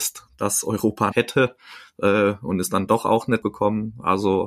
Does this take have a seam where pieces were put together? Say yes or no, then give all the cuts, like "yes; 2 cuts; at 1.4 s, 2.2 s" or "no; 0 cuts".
yes; 2 cuts; at 1.1 s, 3.4 s